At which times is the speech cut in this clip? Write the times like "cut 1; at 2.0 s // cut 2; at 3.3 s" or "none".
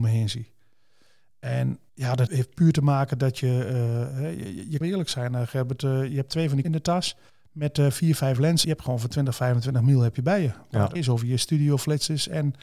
cut 1; at 1.9 s // cut 2; at 2.3 s // cut 3; at 4.8 s // cut 4; at 6.6 s // cut 5; at 7.3 s // cut 6; at 8.6 s // cut 7; at 10.9 s